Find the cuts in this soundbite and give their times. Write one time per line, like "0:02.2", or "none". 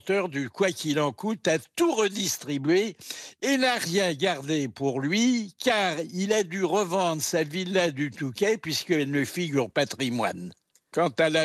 0:09.7